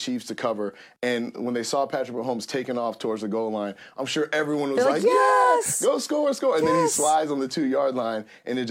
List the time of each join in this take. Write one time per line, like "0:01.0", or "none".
none